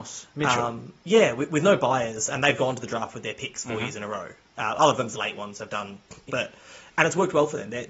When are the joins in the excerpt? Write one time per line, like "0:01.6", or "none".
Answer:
0:05.1
0:06.3